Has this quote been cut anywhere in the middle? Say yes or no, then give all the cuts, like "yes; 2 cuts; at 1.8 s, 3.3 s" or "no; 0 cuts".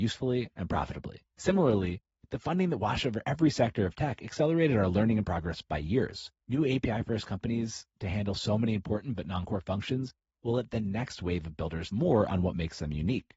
yes; 3 cuts; at 1.3 s, 6.4 s, 11.9 s